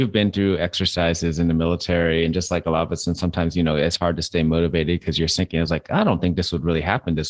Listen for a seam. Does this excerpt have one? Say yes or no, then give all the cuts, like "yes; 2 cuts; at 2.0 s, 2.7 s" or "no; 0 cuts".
no; 0 cuts